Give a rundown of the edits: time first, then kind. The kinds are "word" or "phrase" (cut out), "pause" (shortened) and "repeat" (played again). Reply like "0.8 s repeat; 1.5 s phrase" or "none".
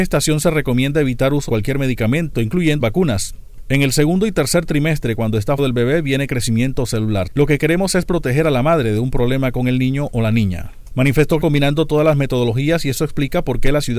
1.5 s word; 2.8 s word; 5.6 s word; 11.4 s word

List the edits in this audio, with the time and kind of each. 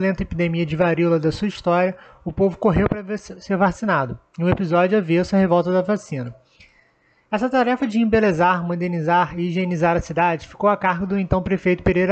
none

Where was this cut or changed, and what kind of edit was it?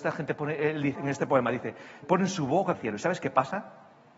1.0 s word; 2.0 s word; 2.7 s word

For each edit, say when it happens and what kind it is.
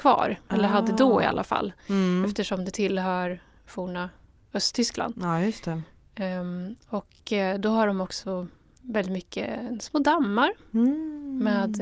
none

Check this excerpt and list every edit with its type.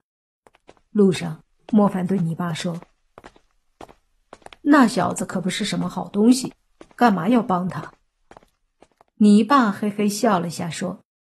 none

